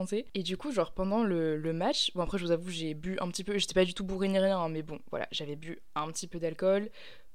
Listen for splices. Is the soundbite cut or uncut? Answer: uncut